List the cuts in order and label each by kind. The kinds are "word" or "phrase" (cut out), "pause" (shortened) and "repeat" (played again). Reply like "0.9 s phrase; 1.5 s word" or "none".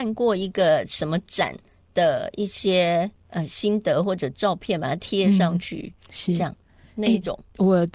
none